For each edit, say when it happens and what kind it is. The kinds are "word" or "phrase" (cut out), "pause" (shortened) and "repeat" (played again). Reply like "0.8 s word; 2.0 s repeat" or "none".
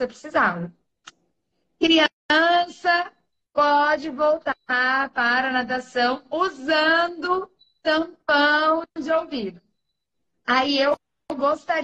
none